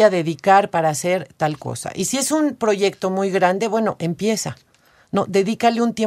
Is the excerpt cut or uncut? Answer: uncut